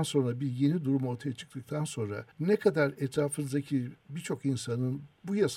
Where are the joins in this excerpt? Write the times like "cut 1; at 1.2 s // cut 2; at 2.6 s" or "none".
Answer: cut 1; at 2.3 s

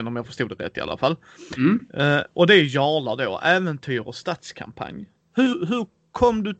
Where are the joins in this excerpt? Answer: cut 1; at 5.2 s

